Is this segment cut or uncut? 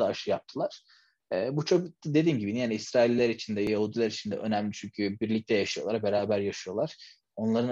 uncut